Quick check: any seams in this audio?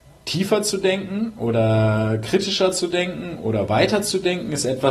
no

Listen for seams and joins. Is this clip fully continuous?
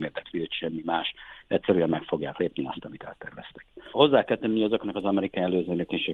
yes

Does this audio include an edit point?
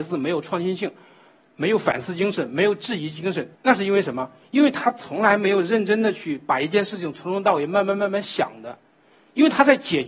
yes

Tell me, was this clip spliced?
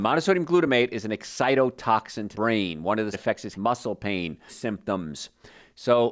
yes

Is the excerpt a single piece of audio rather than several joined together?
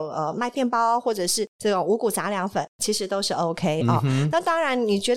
yes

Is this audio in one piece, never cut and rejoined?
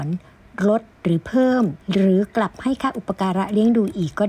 no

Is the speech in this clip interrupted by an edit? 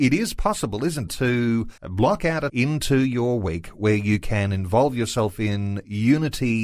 yes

